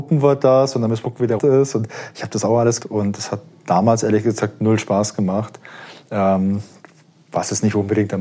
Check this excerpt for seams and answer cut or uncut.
cut